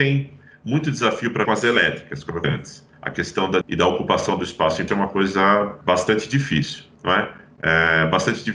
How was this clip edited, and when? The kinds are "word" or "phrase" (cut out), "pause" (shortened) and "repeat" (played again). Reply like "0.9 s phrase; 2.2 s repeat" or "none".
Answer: 1.4 s word; 2.4 s word; 2.9 s pause; 3.6 s phrase; 4.9 s word; 5.8 s pause; 6.9 s pause